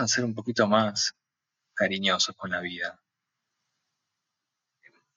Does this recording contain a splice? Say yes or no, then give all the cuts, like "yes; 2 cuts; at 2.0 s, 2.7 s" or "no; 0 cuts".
no; 0 cuts